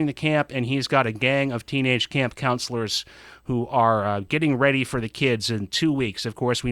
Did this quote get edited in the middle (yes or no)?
no